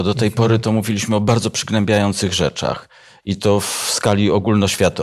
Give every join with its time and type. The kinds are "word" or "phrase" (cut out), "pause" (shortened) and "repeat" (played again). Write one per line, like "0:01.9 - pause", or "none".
none